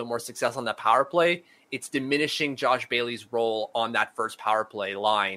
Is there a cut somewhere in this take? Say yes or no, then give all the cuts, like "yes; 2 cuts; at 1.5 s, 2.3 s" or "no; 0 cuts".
no; 0 cuts